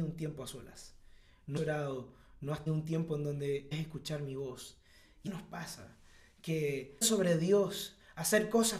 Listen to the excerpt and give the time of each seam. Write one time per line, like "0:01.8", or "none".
0:01.6
0:02.7
0:03.7
0:05.3
0:07.0